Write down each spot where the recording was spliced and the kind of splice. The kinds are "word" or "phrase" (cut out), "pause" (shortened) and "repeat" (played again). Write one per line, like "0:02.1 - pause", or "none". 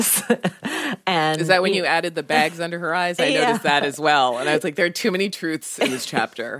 none